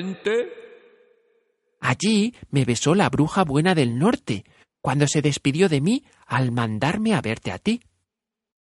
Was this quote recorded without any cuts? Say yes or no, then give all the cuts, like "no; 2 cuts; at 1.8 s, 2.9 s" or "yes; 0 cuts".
yes; 0 cuts